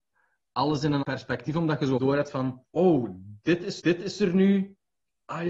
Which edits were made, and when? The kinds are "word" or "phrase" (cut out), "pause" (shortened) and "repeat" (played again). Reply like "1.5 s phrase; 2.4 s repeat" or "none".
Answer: 1.0 s word; 2.0 s word; 2.7 s pause; 3.8 s repeat